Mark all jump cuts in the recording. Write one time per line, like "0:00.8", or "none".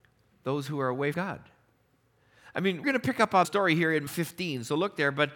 0:01.1
0:02.8
0:03.4
0:04.1